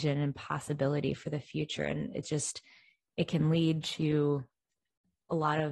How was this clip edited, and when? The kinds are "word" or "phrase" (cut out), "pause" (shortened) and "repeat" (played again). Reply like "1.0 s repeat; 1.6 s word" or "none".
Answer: none